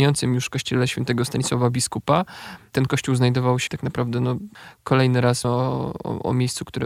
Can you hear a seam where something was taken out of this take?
yes; 2 cuts; at 3.7 s, 5.4 s

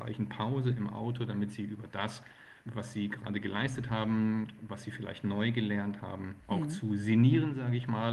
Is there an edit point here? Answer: yes; 1 cut; at 2.6 s

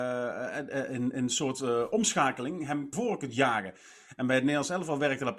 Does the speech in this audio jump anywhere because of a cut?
yes; 1 cut; at 2.9 s

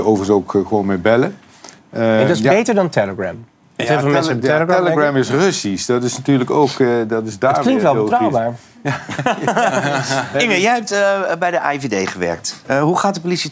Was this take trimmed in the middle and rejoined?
yes; 1 cut; at 1.8 s

